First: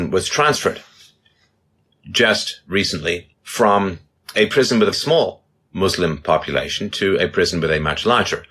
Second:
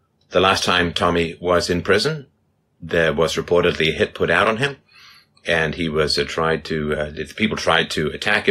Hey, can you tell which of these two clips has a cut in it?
first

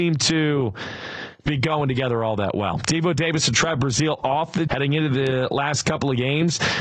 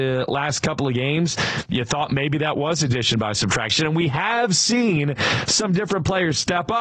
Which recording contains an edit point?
first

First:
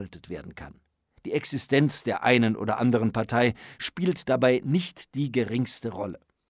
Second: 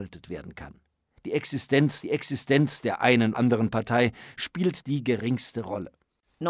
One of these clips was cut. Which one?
second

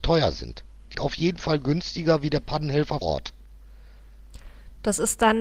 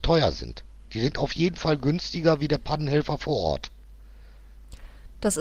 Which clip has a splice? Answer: first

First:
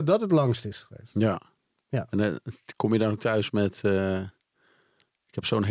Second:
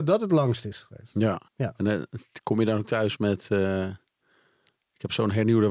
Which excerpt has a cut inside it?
second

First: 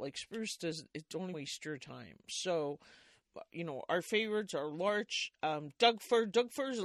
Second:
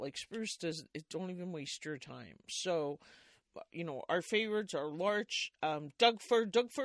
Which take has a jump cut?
first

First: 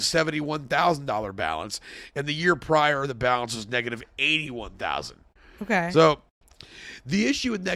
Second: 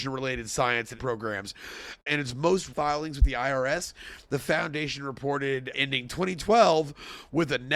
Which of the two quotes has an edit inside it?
second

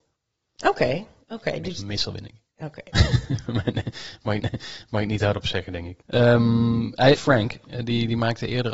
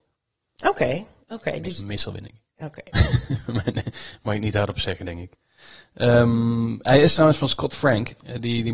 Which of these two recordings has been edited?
first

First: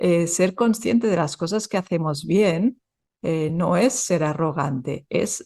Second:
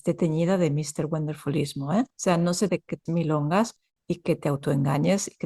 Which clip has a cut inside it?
second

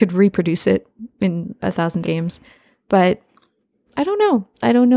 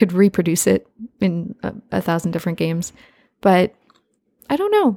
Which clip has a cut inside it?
first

